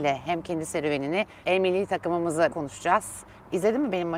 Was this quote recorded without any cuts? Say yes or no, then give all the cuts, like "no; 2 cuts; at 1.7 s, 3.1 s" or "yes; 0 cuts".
no; 2 cuts; at 1.4 s, 2.5 s